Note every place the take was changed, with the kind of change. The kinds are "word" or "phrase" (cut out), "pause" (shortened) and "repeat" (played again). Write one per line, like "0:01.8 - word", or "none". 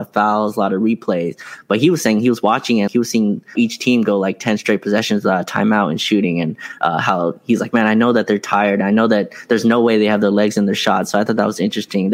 0:02.9 - word
0:03.6 - word